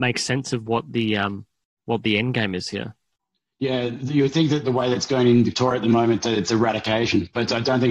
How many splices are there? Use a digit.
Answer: 0